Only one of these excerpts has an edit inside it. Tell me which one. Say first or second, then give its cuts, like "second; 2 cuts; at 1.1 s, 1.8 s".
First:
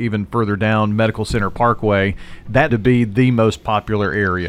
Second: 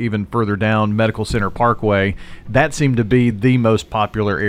first; 1 cut; at 2.7 s